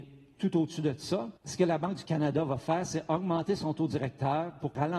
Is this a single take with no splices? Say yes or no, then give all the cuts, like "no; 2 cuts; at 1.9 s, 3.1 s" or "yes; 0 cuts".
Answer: no; 1 cut; at 1.4 s